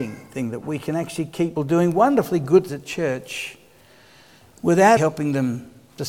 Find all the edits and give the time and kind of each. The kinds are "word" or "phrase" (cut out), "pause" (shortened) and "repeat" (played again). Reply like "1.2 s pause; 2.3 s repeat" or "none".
1.6 s word; 2.7 s word; 5.0 s word